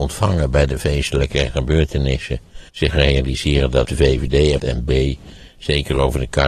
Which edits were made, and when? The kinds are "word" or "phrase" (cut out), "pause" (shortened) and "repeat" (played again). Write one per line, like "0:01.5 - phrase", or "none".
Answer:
0:02.7 - pause
0:03.8 - phrase
0:04.6 - word